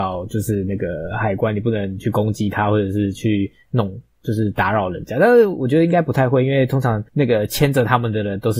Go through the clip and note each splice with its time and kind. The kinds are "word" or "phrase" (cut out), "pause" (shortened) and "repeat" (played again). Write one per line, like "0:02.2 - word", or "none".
0:07.1 - pause